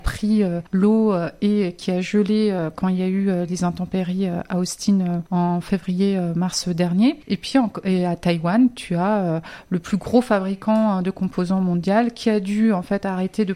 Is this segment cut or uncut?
uncut